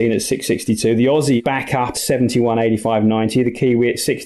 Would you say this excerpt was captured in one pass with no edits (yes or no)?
no